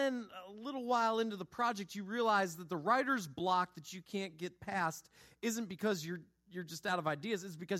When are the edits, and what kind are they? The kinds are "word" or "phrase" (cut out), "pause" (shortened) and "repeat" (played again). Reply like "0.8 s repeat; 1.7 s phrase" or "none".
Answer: none